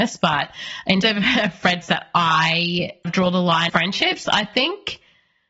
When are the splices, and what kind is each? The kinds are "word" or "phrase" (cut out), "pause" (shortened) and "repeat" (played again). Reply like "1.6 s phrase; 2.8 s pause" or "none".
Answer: 1.0 s word; 1.8 s word; 3.0 s word; 3.7 s phrase